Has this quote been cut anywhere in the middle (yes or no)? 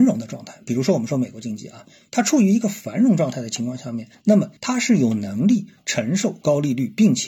no